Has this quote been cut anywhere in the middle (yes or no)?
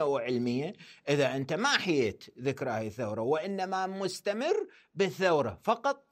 no